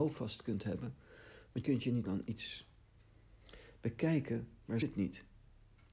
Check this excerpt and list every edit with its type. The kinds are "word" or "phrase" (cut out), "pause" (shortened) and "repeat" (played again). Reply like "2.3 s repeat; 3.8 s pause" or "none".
1.6 s word; 2.0 s word; 4.8 s word